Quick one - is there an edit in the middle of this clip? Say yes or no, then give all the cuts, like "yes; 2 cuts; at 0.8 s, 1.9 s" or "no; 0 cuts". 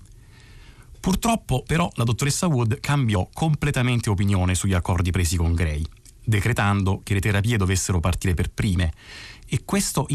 no; 0 cuts